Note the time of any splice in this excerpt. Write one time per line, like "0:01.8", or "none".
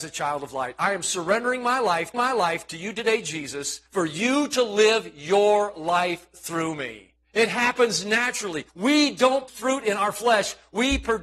0:02.1
0:03.9
0:07.2
0:08.7
0:09.5